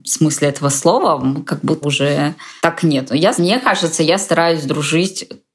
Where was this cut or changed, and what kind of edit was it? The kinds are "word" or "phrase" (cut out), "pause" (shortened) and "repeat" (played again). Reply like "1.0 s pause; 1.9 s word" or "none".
1.8 s word; 2.6 s word; 3.4 s word